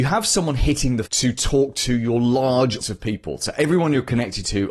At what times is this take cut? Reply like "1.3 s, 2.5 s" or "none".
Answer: 1.1 s, 2.8 s